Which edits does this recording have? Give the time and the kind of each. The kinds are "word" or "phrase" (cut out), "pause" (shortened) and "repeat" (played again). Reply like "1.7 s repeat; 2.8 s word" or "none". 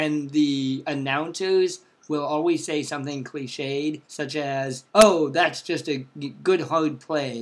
4.0 s pause; 4.9 s pause